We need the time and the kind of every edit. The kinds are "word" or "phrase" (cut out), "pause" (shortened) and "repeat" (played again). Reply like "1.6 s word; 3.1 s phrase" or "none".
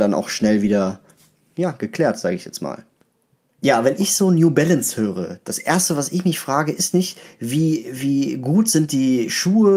none

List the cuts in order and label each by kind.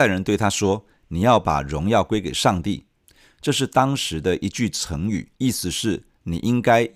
5.3 s pause

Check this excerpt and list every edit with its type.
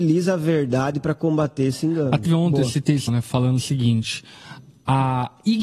2.3 s word; 3.1 s word

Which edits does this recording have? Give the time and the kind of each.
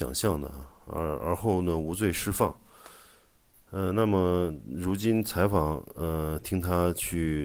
none

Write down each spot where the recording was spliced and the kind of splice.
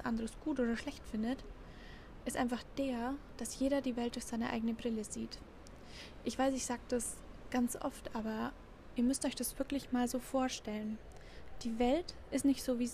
none

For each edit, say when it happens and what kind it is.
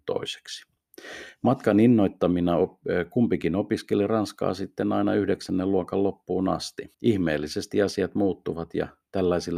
6.9 s pause

